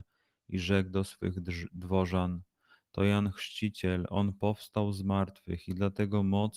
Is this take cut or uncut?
uncut